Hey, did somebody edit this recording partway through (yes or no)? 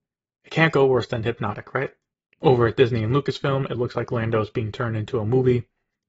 no